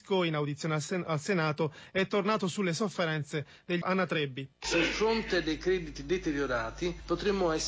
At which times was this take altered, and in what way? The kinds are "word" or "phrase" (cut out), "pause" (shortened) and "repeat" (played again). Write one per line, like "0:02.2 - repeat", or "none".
0:03.8 - phrase
0:04.5 - pause